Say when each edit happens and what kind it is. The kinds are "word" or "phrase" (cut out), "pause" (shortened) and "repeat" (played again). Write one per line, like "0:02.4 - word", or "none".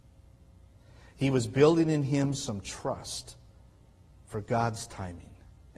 none

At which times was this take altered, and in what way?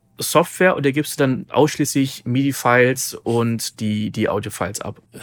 none

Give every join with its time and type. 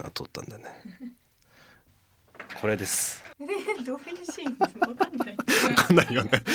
0:03.3 - pause

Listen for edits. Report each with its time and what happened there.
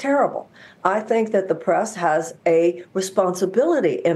none

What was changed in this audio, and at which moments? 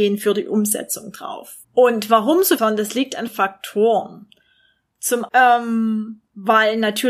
0:01.6 - pause
0:02.6 - phrase
0:03.3 - word
0:05.3 - word

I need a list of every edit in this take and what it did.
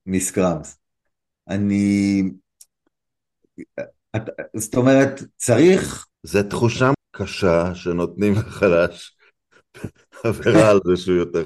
0:06.1 - pause
0:06.9 - word

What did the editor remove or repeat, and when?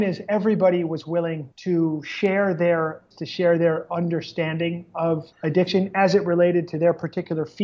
0:01.5 - pause
0:03.1 - word
0:05.3 - pause

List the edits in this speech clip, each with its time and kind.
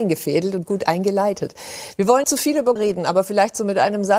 0:02.2 - word
0:02.8 - word

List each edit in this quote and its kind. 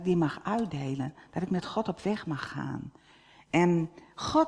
none

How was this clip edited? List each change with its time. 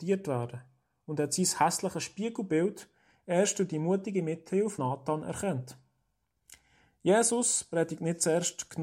0:04.8 - word

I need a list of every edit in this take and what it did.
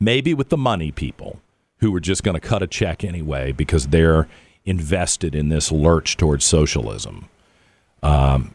none

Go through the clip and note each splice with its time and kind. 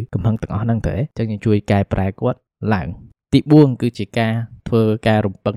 none

